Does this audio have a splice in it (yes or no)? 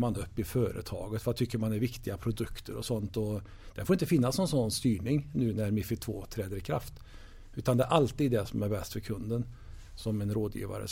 no